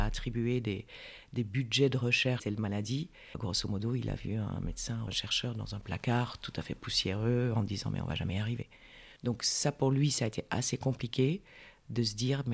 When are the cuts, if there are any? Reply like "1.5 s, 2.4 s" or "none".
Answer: 2.4 s, 5.1 s, 9.2 s